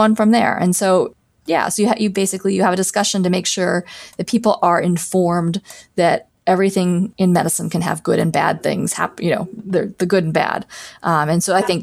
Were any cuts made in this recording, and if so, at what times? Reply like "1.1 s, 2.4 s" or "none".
none